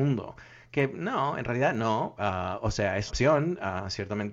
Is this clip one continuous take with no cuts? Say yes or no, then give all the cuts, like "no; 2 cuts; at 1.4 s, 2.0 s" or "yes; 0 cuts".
no; 1 cut; at 3.1 s